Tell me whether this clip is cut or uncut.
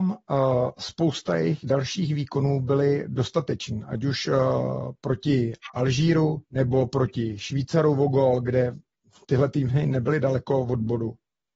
cut